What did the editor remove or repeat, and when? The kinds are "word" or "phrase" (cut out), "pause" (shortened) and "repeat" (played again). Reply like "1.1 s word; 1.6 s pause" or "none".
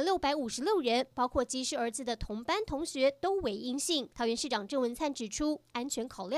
4.1 s pause